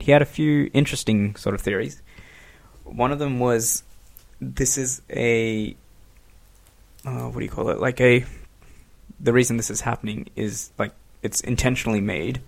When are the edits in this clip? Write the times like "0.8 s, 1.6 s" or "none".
none